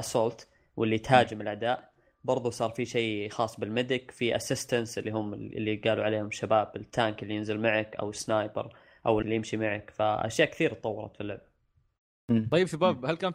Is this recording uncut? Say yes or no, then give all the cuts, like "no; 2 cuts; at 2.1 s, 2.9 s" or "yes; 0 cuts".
no; 1 cut; at 9.2 s